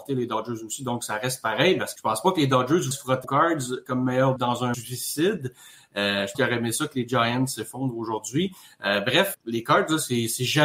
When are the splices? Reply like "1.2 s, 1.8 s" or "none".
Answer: 2.0 s, 2.9 s, 3.2 s, 4.4 s, 4.7 s, 6.3 s, 9.3 s